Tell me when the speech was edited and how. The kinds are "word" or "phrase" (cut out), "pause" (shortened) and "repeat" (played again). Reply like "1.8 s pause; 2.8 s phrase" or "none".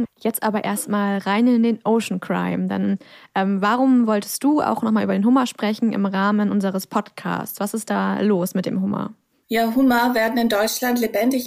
none